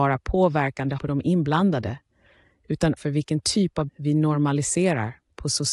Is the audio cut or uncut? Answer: cut